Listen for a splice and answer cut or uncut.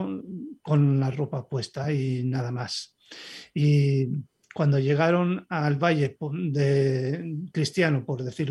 uncut